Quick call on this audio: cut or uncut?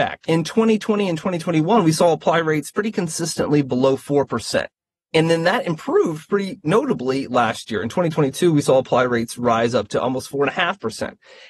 uncut